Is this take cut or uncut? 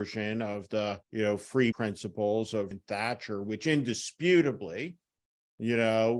cut